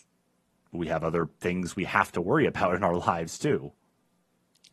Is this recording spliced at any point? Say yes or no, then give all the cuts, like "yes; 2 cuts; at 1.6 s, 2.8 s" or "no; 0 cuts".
no; 0 cuts